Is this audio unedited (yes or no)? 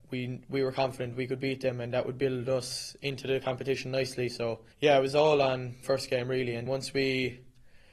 no